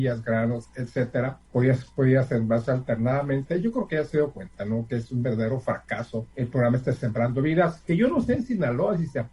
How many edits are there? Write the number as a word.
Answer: two